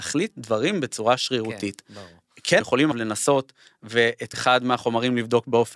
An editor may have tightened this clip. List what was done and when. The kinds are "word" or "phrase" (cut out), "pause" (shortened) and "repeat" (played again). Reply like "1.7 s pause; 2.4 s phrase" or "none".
2.6 s word; 2.9 s word; 4.3 s word